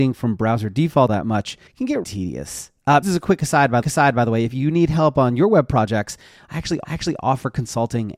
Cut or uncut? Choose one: cut